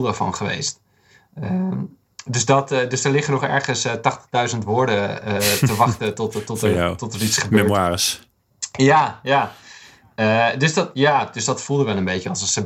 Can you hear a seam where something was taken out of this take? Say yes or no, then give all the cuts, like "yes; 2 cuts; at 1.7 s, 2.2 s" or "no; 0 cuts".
no; 0 cuts